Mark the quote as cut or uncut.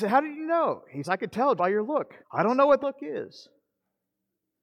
cut